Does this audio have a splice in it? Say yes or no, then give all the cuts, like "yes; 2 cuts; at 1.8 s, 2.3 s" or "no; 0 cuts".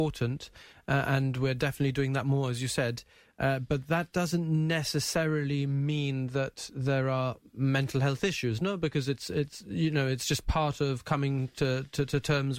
no; 0 cuts